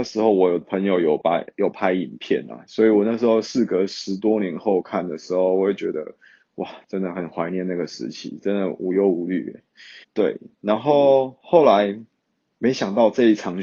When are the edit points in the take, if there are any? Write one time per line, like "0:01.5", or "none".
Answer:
0:10.0
0:12.3